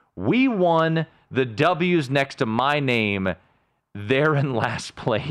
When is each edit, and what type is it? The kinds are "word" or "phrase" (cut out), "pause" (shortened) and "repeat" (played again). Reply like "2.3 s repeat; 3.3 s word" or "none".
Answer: none